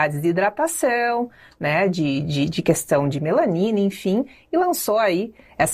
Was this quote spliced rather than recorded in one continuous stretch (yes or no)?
no